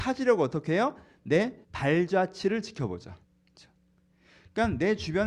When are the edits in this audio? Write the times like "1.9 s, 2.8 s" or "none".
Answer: 1.6 s, 3.2 s